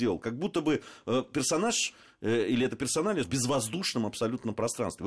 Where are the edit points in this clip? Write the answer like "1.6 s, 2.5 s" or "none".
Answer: 3.2 s